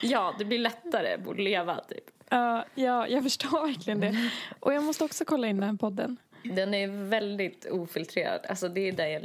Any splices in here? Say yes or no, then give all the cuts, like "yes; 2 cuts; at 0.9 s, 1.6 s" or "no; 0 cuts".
no; 0 cuts